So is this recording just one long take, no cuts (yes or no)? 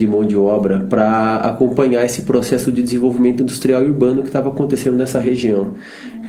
yes